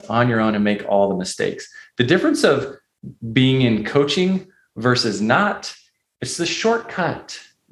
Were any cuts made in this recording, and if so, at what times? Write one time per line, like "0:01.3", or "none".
none